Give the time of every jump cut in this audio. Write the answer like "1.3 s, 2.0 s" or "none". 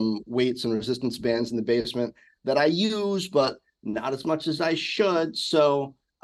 none